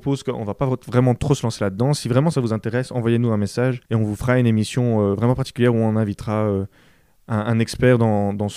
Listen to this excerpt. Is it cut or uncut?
cut